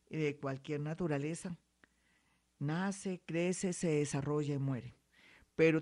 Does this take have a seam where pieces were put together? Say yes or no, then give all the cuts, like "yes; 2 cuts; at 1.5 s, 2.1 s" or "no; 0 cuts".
no; 0 cuts